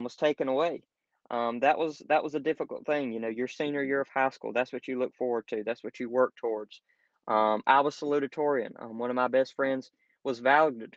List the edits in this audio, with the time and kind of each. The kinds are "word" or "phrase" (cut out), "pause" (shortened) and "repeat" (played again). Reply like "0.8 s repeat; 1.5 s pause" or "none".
none

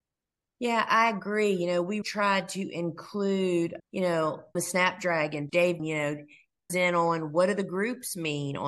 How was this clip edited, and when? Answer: 2.0 s word; 3.8 s word; 4.5 s word; 5.5 s word; 5.8 s word; 6.7 s word

